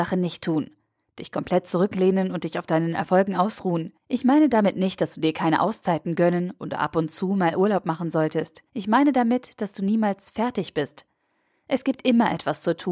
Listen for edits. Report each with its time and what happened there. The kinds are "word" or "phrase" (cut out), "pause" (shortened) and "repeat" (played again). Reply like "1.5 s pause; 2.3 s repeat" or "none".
4.0 s pause; 8.7 s pause